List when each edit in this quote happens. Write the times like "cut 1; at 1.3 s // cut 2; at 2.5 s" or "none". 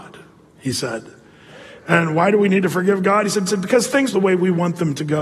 cut 1; at 3.5 s // cut 2; at 4.1 s